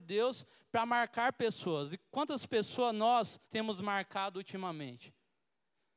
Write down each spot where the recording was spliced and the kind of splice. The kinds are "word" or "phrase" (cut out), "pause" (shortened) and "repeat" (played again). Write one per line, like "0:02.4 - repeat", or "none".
0:03.4 - pause

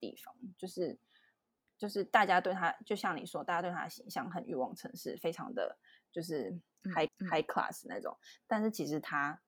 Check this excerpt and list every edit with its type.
0:07.1 - repeat

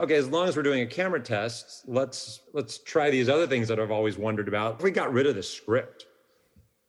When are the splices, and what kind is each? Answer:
0:02.5 - pause
0:04.8 - phrase

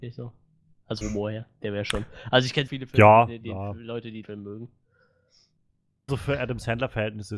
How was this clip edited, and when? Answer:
0:01.0 - word
0:02.7 - word
0:03.4 - word
0:04.2 - word
0:06.1 - word

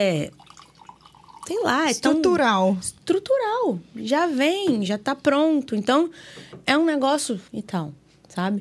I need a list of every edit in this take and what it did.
0:07.5 - pause

